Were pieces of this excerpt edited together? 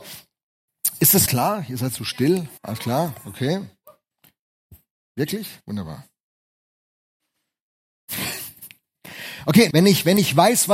yes; 4 cuts; at 1.3 s, 2.6 s, 5.6 s, 9.7 s

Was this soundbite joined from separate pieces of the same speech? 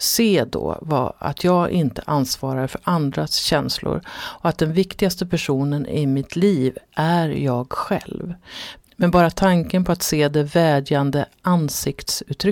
no; 0 cuts

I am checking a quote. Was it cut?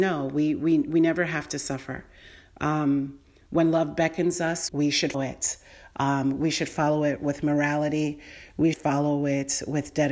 yes; 3 cuts; at 4.7 s, 5.1 s, 8.7 s

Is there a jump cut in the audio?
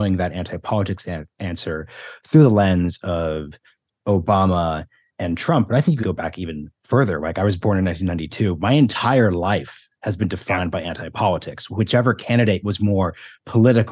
yes; 1 cut; at 6.0 s

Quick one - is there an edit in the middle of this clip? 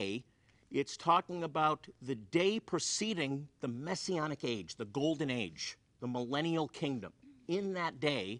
no; 0 cuts

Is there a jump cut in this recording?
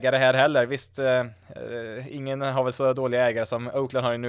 no; 0 cuts

